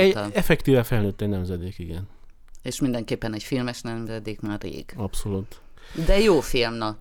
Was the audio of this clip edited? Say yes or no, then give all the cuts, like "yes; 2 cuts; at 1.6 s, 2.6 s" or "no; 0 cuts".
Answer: no; 0 cuts